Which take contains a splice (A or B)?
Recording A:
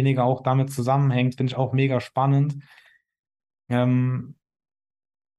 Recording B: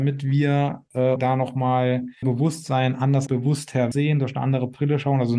B